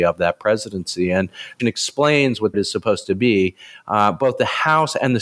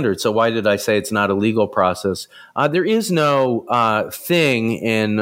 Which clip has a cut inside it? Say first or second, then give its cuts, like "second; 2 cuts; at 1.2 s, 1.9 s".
first; 2 cuts; at 1.6 s, 2.5 s